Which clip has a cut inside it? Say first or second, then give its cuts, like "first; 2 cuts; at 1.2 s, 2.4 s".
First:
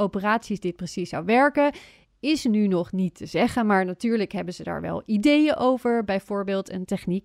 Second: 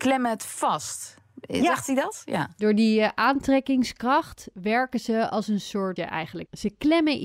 second; 1 cut; at 6.0 s